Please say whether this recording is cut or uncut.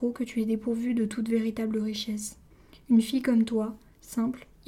cut